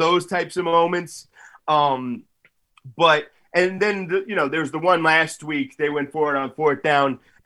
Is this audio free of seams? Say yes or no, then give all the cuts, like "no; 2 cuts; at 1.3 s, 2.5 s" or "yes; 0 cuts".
yes; 0 cuts